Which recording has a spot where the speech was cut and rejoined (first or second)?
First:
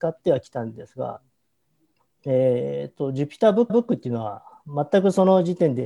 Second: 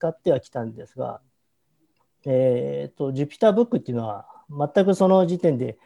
first